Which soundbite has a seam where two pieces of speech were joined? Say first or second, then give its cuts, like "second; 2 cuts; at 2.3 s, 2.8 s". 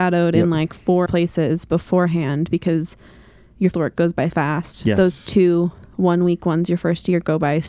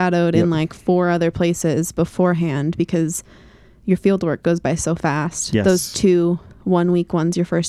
first; 3 cuts; at 1.1 s, 3.7 s, 4.3 s